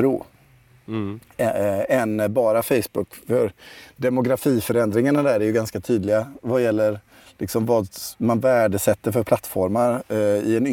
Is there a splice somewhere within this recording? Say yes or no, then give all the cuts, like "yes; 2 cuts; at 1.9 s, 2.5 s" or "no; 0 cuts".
no; 0 cuts